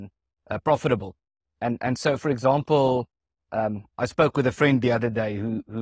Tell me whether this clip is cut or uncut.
uncut